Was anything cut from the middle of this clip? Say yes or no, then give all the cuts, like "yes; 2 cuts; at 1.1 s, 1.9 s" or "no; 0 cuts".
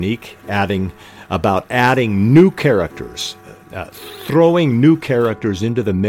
yes; 1 cut; at 3.6 s